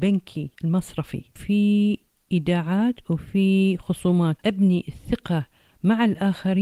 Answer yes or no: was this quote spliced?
yes